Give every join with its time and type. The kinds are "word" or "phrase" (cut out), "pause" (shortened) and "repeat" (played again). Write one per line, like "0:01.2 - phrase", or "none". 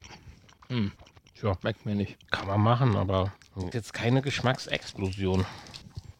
0:01.6 - pause
0:02.3 - pause
0:03.7 - word